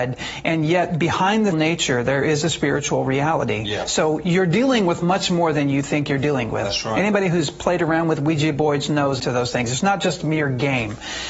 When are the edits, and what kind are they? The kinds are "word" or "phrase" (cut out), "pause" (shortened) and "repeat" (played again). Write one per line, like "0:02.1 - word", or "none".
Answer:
0:01.5 - word
0:09.2 - phrase